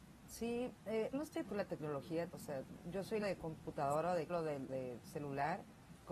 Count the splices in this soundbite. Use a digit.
7